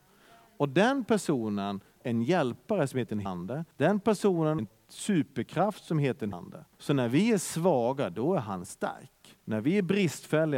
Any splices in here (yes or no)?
yes